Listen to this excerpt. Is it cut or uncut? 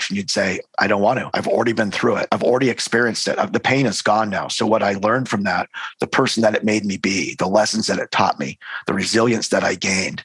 uncut